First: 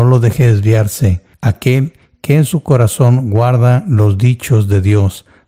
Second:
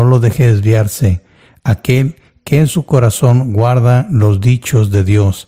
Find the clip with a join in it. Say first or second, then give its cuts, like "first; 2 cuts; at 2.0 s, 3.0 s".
first; 1 cut; at 1.3 s